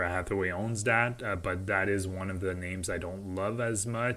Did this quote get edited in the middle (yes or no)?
no